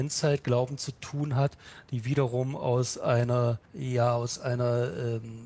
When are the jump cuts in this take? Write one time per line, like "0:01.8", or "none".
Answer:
0:03.6